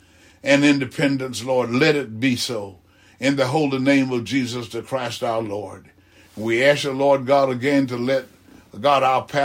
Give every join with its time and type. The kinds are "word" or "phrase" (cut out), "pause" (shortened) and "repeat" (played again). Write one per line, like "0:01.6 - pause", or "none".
none